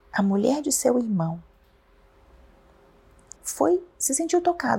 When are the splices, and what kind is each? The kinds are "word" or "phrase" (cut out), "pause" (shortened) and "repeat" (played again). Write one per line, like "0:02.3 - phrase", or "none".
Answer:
0:03.4 - word